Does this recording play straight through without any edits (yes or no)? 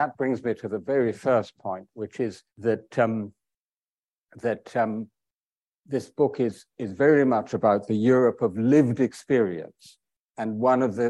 no